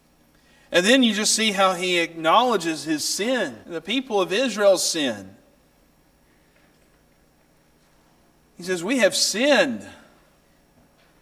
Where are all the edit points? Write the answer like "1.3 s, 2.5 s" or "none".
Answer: 3.6 s